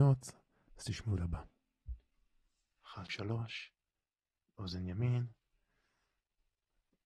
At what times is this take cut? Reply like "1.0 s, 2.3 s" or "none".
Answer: 1.2 s, 3.1 s